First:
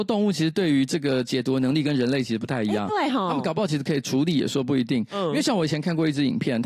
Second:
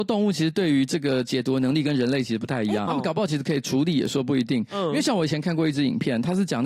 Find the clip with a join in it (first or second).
second